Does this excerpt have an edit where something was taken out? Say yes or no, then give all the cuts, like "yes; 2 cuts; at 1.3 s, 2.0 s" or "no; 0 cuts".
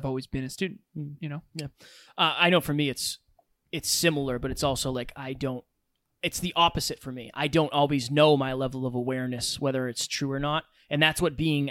no; 0 cuts